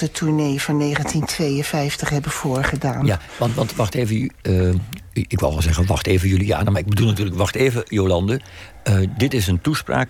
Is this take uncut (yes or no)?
yes